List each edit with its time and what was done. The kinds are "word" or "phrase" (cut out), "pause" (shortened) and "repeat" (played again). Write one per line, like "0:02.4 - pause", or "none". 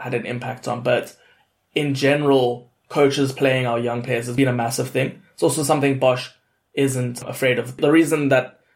none